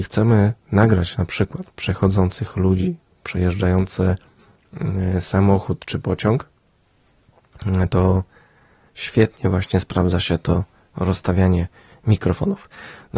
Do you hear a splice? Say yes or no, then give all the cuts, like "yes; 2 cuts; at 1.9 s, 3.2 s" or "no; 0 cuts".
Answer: yes; 1 cut; at 11.9 s